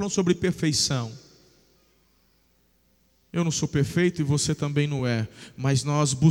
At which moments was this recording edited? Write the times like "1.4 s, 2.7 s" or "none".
none